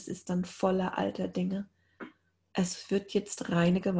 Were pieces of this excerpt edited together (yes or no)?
no